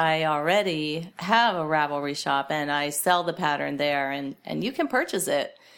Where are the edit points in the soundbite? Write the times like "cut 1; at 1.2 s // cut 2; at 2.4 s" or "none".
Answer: none